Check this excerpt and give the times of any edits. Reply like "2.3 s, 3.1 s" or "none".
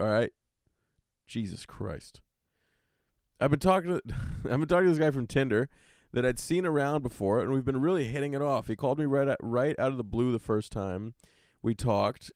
none